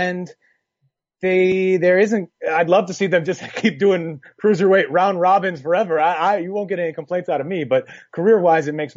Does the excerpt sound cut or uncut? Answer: uncut